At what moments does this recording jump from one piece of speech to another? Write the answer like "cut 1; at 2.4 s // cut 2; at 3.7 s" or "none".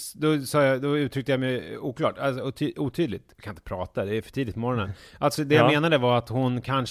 none